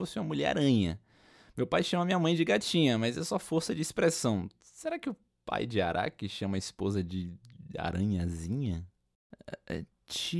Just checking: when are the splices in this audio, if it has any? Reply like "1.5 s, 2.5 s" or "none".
none